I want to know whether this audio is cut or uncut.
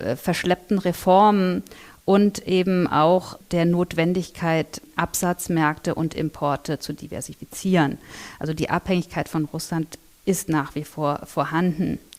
uncut